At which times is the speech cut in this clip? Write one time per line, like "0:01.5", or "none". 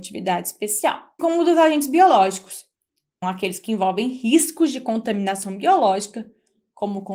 0:01.2
0:03.2